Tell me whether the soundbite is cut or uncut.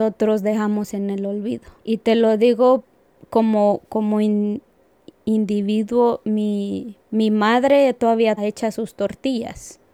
cut